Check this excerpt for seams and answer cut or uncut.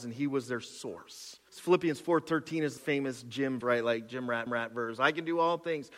cut